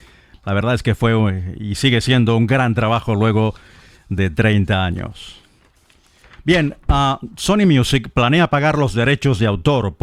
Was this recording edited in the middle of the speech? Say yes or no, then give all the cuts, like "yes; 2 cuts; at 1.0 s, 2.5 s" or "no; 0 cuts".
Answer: no; 0 cuts